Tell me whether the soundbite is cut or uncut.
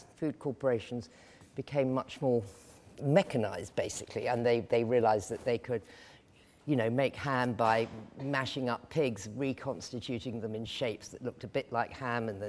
uncut